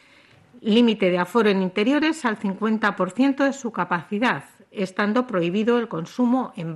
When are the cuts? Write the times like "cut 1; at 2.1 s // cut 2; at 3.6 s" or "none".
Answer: none

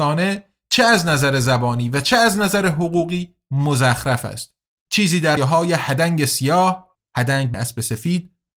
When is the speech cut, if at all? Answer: cut 1; at 5.4 s // cut 2; at 6.9 s // cut 3; at 7.5 s

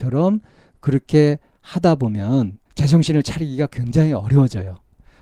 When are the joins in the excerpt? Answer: cut 1; at 2.7 s

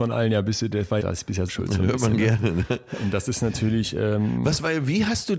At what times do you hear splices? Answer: cut 1; at 1.0 s // cut 2; at 1.5 s

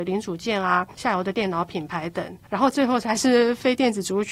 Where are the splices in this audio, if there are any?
cut 1; at 0.9 s

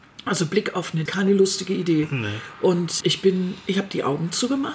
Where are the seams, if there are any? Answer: cut 1; at 1.1 s // cut 2; at 3.0 s

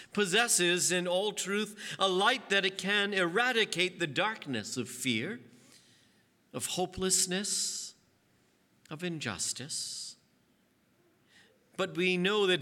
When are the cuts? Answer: none

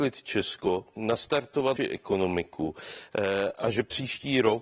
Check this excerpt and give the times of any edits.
cut 1; at 1.8 s

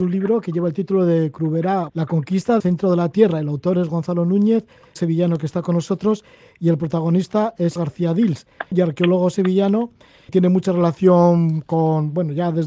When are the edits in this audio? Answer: cut 1; at 1.9 s // cut 2; at 2.6 s // cut 3; at 5.0 s // cut 4; at 7.8 s // cut 5; at 8.7 s // cut 6; at 10.3 s

